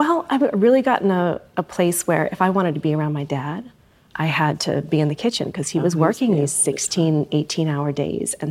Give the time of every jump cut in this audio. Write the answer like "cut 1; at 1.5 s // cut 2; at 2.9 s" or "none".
none

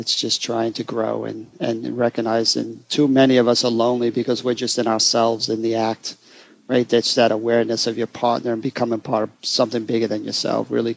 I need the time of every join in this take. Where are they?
none

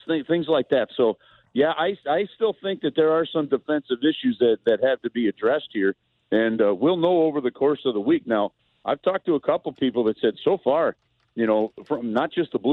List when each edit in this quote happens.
none

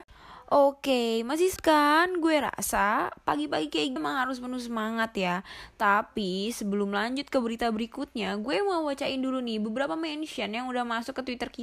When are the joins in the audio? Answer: cut 1; at 1.6 s // cut 2; at 4.0 s

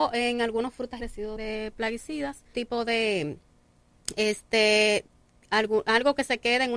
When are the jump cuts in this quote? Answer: cut 1; at 1.0 s // cut 2; at 1.4 s // cut 3; at 2.5 s

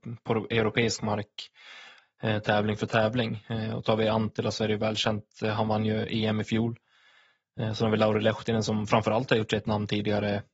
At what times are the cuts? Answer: none

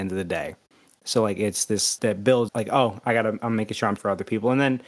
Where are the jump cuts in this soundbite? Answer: cut 1; at 2.0 s // cut 2; at 2.5 s // cut 3; at 4.0 s

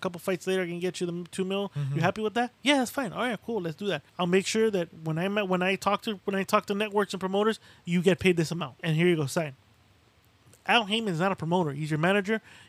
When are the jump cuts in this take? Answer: cut 1; at 2.5 s // cut 2; at 4.1 s // cut 3; at 8.8 s

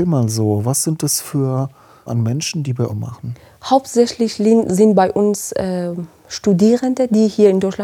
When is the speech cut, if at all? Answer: cut 1; at 2.1 s // cut 2; at 2.9 s

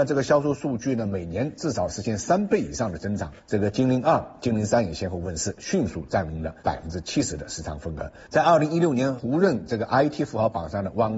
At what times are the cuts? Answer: cut 1; at 6.6 s

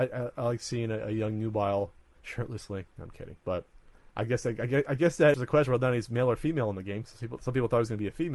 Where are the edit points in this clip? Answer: cut 1; at 3.4 s // cut 2; at 5.3 s

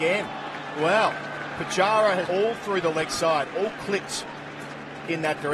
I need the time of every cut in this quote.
cut 1; at 2.3 s

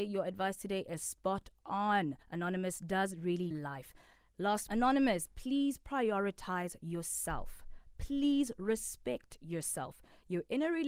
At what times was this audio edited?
cut 1; at 2.2 s // cut 2; at 3.5 s // cut 3; at 4.7 s

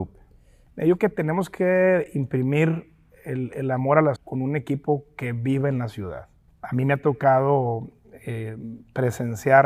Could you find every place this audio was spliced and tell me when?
cut 1; at 1.0 s // cut 2; at 4.2 s // cut 3; at 6.5 s

